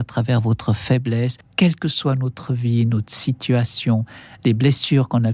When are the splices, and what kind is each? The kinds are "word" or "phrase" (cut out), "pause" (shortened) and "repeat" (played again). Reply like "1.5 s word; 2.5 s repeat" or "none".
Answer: none